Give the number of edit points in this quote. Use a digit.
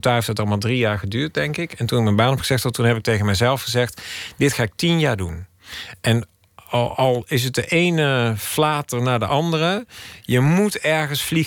0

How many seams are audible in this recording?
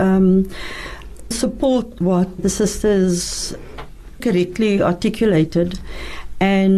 3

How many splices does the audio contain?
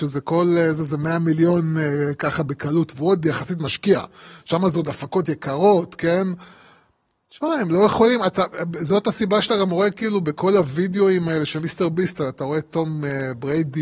0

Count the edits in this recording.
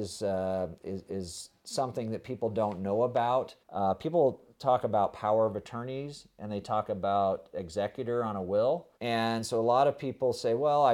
2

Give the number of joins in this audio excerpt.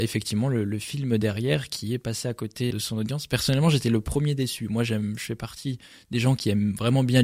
1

